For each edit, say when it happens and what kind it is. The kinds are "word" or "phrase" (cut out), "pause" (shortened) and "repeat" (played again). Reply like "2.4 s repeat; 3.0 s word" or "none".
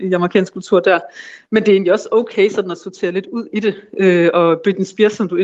none

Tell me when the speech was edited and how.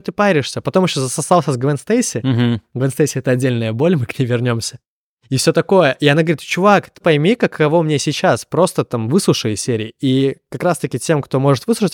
7.0 s word

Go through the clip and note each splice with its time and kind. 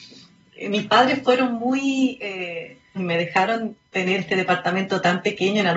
3.0 s word; 4.2 s word

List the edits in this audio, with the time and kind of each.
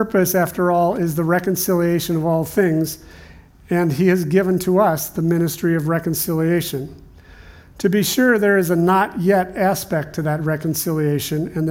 none

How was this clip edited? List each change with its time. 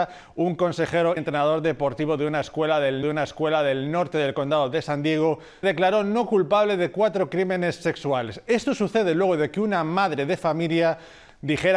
1.2 s word; 3.0 s repeat; 5.6 s word

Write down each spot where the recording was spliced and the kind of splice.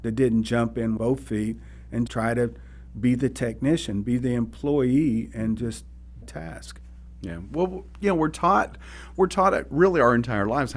1.0 s word; 2.1 s word; 6.2 s phrase

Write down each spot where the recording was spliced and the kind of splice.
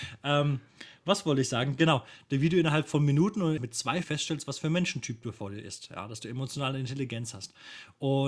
3.6 s word; 4.0 s word

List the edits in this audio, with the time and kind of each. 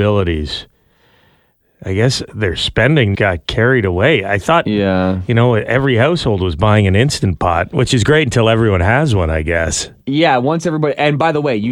3.1 s word

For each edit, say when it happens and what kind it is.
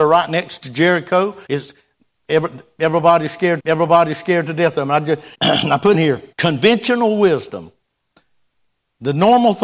1.5 s pause; 3.6 s repeat; 5.3 s pause; 5.9 s word; 6.3 s pause

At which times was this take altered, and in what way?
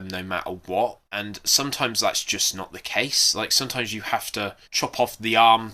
1.1 s pause; 4.6 s pause

